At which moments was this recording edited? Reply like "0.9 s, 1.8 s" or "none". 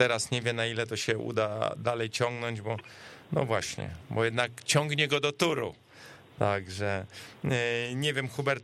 3.3 s